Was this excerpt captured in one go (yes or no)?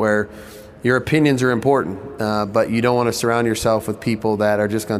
yes